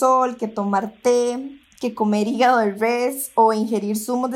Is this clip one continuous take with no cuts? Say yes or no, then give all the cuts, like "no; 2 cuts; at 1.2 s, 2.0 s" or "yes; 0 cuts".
yes; 0 cuts